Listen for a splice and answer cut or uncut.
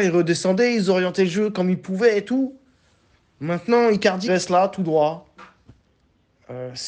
cut